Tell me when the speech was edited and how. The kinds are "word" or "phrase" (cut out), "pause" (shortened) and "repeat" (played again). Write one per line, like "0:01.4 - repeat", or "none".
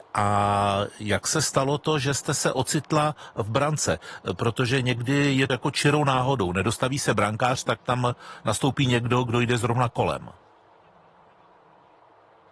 0:05.5 - word